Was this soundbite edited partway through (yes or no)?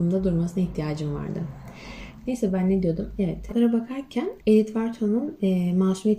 yes